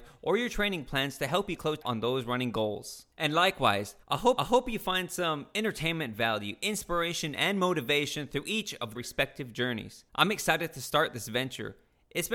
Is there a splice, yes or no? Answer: yes